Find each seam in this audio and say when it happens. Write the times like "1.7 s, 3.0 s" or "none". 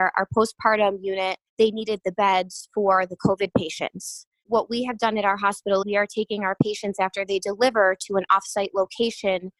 1.5 s, 4.5 s, 5.8 s